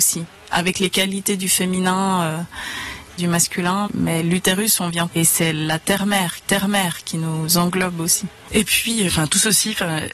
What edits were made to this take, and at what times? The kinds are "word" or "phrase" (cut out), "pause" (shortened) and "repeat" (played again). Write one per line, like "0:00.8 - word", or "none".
0:03.2 - phrase
0:03.9 - word
0:05.1 - phrase
0:06.4 - repeat
0:09.1 - word